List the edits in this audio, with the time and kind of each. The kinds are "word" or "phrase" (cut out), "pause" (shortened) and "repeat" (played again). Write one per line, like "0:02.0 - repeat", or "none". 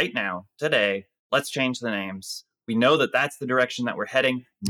0:01.2 - pause